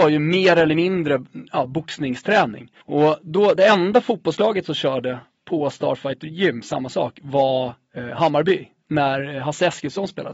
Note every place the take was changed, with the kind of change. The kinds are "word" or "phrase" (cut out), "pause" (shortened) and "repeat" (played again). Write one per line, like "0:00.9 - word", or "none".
0:02.8 - pause